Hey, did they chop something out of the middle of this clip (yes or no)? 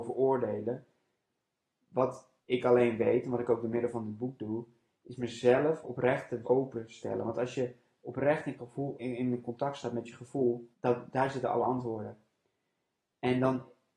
yes